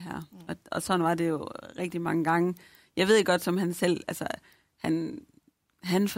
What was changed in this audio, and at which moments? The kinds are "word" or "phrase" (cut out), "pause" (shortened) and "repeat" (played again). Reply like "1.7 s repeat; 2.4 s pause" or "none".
none